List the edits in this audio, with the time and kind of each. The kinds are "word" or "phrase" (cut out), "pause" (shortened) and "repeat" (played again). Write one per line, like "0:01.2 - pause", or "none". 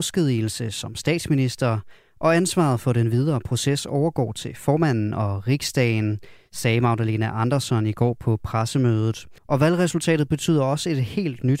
0:09.4 - pause